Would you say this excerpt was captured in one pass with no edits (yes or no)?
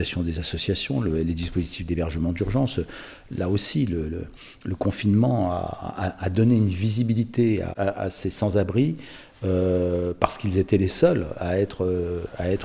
yes